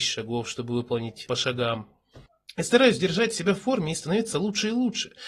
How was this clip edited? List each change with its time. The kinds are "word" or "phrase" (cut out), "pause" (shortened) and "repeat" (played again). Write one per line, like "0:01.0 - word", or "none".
0:01.3 - phrase
0:02.3 - pause

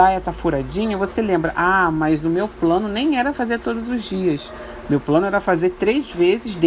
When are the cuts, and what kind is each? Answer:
none

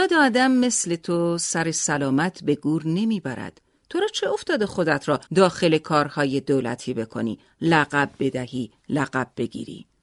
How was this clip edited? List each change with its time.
0:05.3 - pause

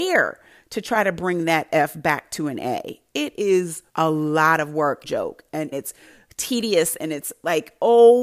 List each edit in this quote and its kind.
0:03.9 - pause
0:05.0 - phrase
0:05.7 - phrase

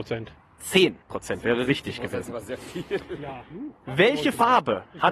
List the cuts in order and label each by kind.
0:01.0 - pause

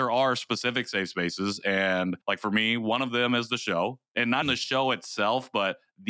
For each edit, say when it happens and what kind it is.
0:02.2 - pause
0:04.4 - word

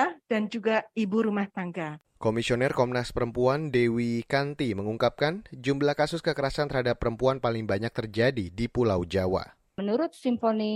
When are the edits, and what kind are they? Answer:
none

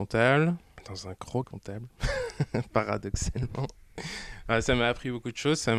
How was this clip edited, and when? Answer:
0:01.4 - word

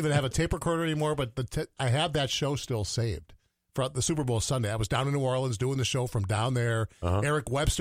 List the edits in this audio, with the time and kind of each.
none

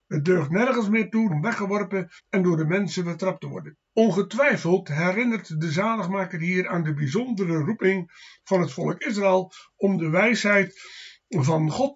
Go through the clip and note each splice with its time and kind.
0:01.3 - word
0:02.2 - pause
0:03.9 - pause

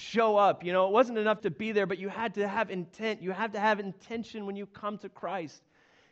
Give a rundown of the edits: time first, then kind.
0:01.4 - word

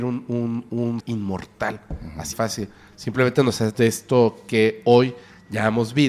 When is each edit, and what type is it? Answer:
0:01.0 - word
0:02.3 - word
0:03.7 - word

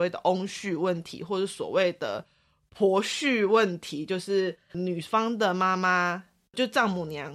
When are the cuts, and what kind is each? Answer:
none

